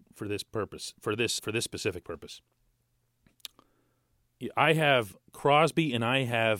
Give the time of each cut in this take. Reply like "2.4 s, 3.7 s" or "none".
1.4 s, 5.2 s